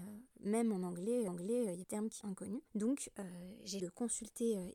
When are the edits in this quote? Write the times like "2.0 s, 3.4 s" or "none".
1.3 s, 1.8 s, 2.2 s, 2.7 s, 3.8 s